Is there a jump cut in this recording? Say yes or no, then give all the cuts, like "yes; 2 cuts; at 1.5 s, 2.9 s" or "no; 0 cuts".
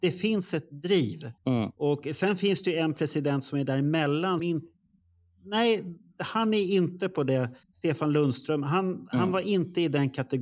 yes; 3 cuts; at 1.4 s, 4.4 s, 7.6 s